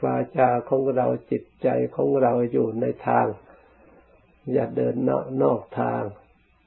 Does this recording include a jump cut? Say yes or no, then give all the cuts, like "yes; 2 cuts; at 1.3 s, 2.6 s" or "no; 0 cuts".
no; 0 cuts